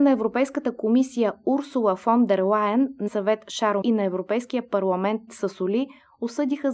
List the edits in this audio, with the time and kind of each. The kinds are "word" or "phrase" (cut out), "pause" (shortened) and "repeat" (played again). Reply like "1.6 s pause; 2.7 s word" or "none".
3.1 s word; 3.8 s word; 5.3 s word